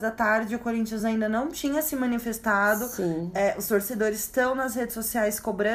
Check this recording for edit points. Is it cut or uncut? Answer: uncut